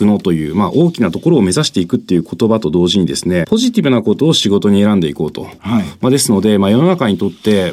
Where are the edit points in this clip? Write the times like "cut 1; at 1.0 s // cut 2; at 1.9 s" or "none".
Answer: cut 1; at 3.4 s